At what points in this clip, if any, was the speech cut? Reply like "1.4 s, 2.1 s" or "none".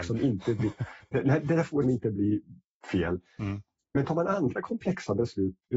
1.8 s